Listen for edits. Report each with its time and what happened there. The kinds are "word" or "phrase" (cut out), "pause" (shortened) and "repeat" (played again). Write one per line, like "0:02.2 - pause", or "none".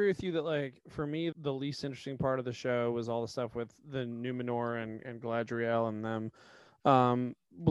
0:01.3 - word